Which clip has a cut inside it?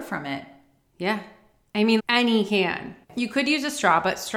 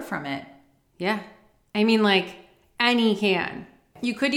first; 2 cuts; at 2.0 s, 3.0 s

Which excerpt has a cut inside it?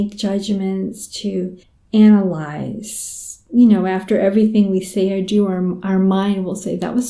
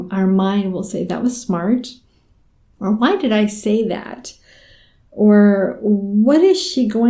first; 1 cut; at 1.6 s

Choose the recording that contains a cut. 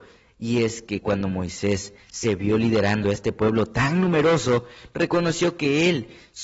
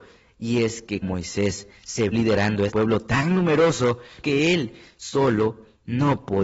second; 4 cuts; at 1.0 s, 2.1 s, 2.7 s, 4.2 s

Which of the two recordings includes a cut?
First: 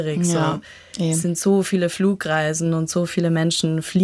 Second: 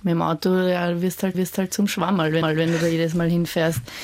second; 2 cuts; at 1.3 s, 2.4 s

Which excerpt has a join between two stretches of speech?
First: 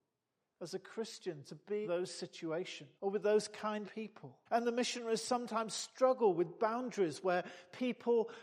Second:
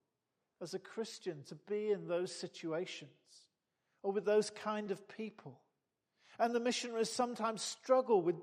first; 4 cuts; at 1.8 s, 3.0 s, 3.8 s, 4.5 s

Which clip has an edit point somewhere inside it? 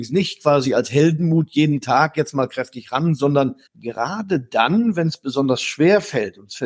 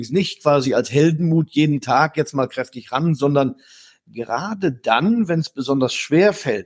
first; 1 cut; at 3.7 s

